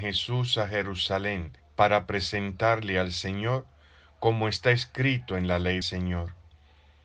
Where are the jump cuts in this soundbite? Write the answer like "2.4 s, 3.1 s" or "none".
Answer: 1.6 s, 5.8 s